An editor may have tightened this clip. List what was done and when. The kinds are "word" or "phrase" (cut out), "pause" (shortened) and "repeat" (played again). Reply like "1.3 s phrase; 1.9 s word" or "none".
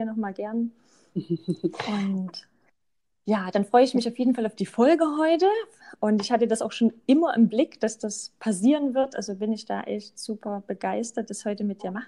none